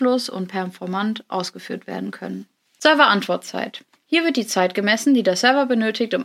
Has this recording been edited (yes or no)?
no